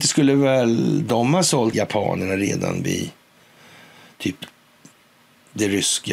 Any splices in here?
yes; 1 cut; at 1.7 s

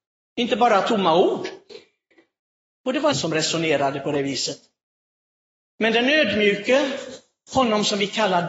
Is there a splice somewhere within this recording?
yes; 1 cut; at 3.1 s

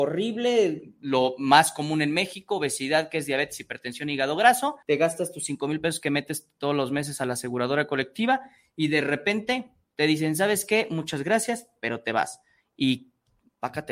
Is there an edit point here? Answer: yes; 1 cut; at 4.8 s

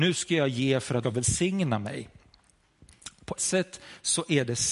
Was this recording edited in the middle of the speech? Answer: yes; 2 cuts; at 1.0 s, 3.4 s

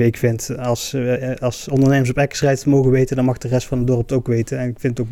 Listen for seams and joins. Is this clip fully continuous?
yes; 0 cuts

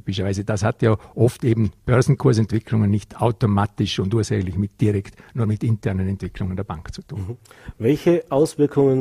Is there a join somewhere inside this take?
no; 0 cuts

